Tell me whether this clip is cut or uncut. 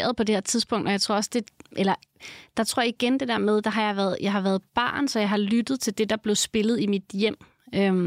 uncut